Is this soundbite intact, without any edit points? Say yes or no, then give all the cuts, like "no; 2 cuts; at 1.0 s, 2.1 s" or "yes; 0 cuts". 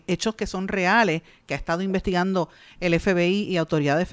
yes; 0 cuts